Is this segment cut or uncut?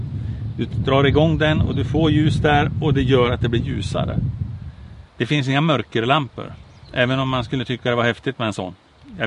cut